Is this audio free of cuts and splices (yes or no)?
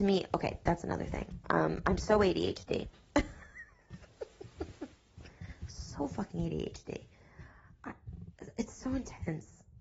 yes